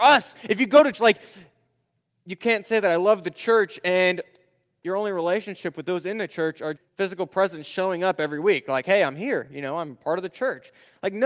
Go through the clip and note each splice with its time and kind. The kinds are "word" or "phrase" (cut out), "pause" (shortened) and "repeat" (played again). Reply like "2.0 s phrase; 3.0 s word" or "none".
0.9 s word; 6.8 s word